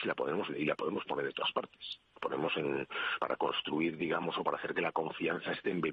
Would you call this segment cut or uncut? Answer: cut